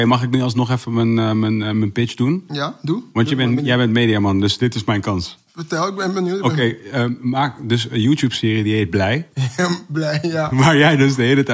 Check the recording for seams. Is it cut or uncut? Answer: uncut